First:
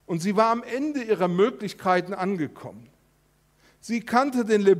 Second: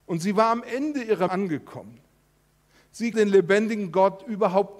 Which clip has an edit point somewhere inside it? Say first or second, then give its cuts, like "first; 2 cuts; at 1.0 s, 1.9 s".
second; 2 cuts; at 1.3 s, 3.1 s